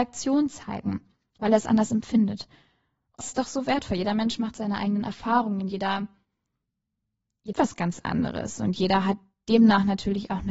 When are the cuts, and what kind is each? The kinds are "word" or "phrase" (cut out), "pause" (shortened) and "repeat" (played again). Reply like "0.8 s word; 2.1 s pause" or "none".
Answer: 3.2 s word; 7.5 s word